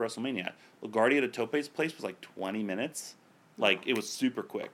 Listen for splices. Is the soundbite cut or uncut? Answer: uncut